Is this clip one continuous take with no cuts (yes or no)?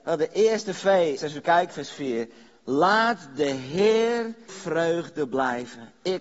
no